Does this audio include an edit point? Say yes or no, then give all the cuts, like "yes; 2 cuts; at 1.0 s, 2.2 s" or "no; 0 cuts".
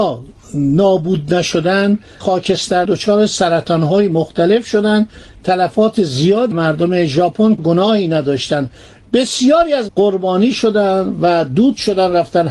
yes; 6 cuts; at 2.2 s, 2.9 s, 5.4 s, 6.5 s, 7.6 s, 9.9 s